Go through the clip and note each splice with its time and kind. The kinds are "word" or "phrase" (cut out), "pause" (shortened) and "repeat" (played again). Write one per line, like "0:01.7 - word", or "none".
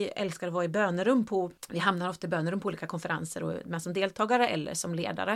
0:01.6 - pause